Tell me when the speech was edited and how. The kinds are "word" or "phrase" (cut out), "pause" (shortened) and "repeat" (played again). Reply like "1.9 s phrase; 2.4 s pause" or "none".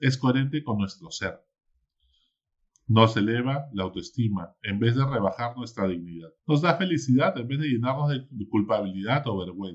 6.4 s pause